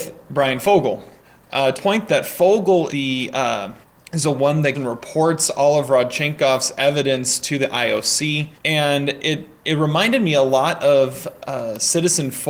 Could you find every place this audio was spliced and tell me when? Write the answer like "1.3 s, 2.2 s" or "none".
1.2 s, 1.7 s, 2.9 s, 3.8 s, 4.7 s, 8.6 s